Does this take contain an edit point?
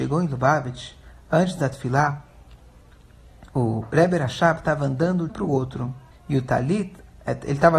yes; 3 cuts; at 3.5 s, 5.3 s, 6.1 s

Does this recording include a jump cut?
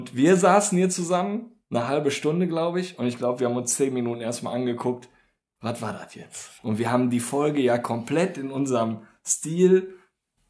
yes; 1 cut; at 6.6 s

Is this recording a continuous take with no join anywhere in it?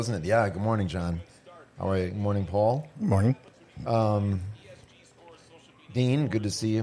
yes; 0 cuts

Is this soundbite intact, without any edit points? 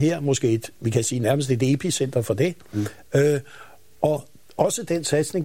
yes; 0 cuts

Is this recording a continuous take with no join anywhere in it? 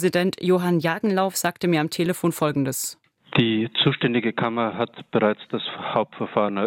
yes; 0 cuts

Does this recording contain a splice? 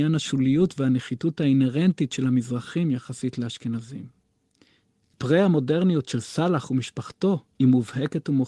no; 0 cuts

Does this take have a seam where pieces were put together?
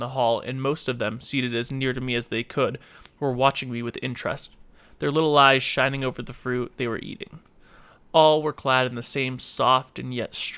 no; 0 cuts

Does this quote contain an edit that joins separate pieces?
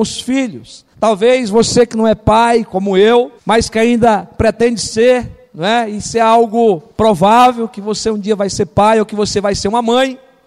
yes; 4 cuts; at 0.9 s, 3.4 s, 5.5 s, 6.9 s

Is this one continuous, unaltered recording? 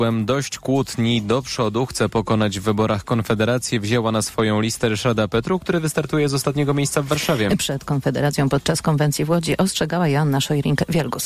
yes; 0 cuts

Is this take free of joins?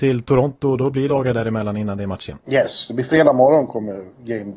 no; 2 cuts; at 1.1 s, 2.4 s

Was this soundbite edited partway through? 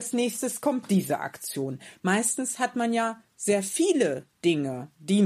no; 0 cuts

